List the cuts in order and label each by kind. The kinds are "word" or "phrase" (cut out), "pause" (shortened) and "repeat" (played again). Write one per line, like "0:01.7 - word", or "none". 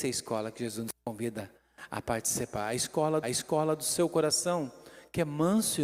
0:03.2 - repeat